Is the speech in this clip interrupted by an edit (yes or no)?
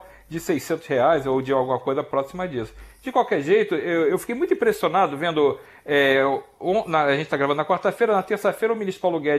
no